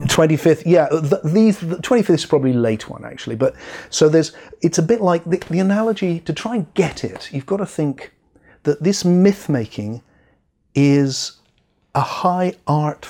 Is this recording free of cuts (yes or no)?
yes